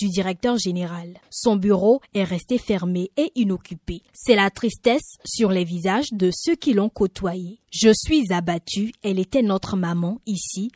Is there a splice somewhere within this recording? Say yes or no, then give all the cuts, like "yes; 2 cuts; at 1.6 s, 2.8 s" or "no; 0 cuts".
no; 0 cuts